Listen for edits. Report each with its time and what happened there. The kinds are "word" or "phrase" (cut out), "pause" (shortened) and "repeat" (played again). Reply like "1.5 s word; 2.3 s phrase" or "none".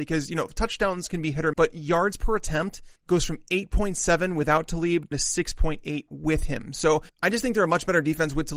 1.5 s word; 3.0 s pause; 5.1 s word; 7.1 s pause